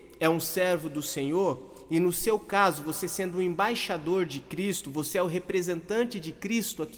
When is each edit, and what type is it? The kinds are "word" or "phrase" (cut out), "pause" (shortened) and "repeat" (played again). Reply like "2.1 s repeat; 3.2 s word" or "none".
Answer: none